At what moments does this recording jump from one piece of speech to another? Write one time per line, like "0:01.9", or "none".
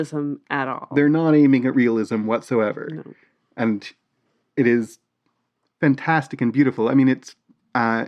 none